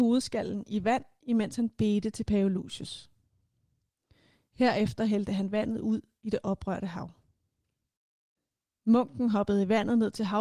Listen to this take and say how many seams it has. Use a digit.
0